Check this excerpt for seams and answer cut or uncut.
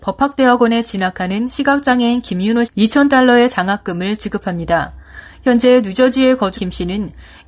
cut